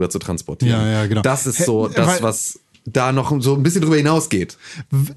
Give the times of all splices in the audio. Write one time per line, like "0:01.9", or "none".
none